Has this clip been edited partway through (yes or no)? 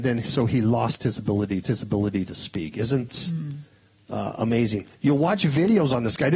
yes